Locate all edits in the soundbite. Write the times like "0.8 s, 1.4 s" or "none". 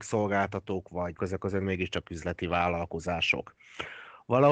1.2 s